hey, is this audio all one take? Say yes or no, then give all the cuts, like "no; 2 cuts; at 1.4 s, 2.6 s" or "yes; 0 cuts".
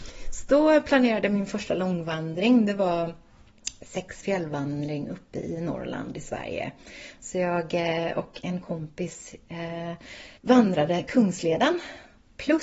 no; 2 cuts; at 4.2 s, 10.4 s